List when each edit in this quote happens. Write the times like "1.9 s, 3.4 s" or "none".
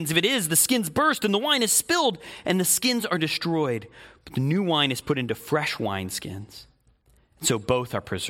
none